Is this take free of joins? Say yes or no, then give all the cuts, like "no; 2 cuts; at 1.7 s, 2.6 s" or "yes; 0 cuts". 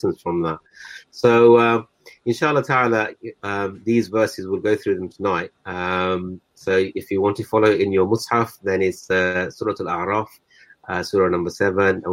yes; 0 cuts